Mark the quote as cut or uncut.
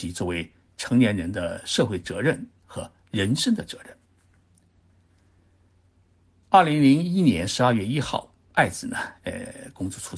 uncut